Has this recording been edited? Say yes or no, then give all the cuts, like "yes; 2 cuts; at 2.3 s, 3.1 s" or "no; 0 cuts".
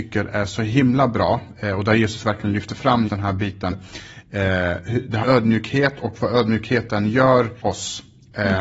yes; 4 cuts; at 3.1 s, 3.7 s, 5.2 s, 7.6 s